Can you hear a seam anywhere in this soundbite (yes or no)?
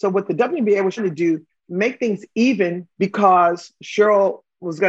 yes